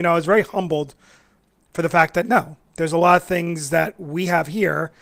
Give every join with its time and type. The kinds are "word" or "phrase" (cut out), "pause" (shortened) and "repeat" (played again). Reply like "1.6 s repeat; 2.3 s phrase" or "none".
none